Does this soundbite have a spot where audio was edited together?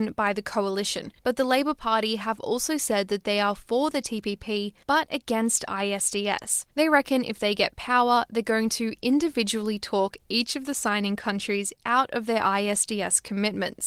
yes; 3 cuts; at 1.2 s, 4.8 s, 6.7 s

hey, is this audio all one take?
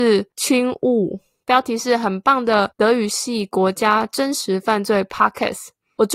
yes; 0 cuts

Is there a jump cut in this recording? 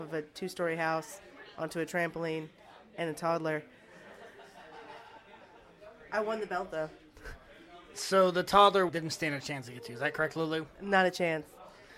no; 0 cuts

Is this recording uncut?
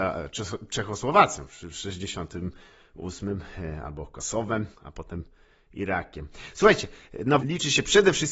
no; 2 cuts; at 4.7 s, 7.4 s

